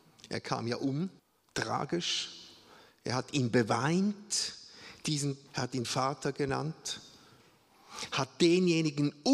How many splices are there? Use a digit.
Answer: 3